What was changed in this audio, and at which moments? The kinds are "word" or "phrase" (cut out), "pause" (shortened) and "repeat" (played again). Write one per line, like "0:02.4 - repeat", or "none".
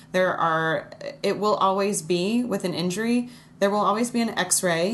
none